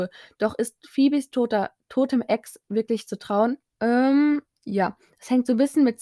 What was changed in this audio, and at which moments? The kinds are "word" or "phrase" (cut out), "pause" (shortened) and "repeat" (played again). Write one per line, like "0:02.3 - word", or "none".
0:03.7 - pause